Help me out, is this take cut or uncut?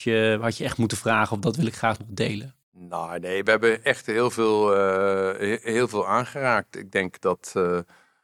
cut